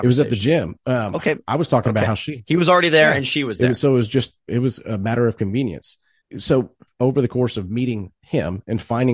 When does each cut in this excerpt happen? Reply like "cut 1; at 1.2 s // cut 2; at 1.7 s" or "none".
cut 1; at 6.2 s